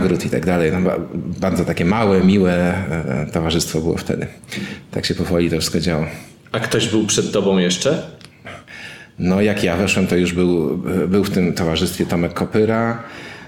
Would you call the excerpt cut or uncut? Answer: uncut